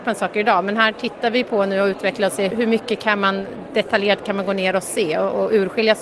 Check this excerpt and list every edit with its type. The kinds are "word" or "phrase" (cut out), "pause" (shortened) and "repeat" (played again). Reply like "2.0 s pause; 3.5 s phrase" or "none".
2.5 s word